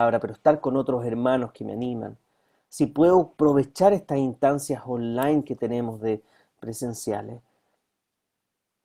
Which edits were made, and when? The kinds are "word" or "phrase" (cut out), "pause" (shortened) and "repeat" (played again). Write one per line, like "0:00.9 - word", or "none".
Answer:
none